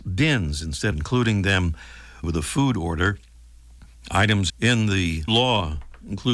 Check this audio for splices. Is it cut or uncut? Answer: cut